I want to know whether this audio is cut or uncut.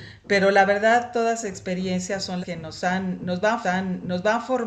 cut